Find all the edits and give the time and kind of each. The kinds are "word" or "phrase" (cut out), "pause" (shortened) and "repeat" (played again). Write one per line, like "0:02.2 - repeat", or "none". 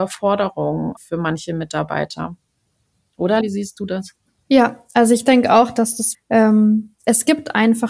0:01.0 - word
0:03.4 - word
0:06.1 - word